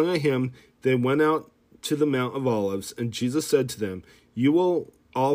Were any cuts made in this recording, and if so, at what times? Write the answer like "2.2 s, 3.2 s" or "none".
none